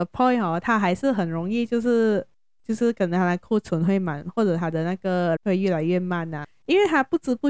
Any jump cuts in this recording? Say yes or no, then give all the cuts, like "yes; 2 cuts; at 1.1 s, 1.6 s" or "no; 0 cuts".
yes; 1 cut; at 5.4 s